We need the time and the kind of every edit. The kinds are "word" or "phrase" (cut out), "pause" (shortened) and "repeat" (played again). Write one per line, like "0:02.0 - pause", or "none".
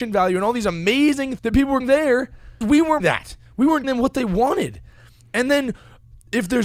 0:01.4 - word
0:01.8 - word
0:02.6 - word
0:03.0 - word
0:03.8 - word